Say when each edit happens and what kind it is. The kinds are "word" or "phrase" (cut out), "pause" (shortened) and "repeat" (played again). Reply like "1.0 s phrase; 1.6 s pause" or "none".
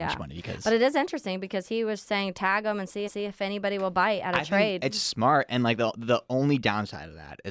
3.1 s repeat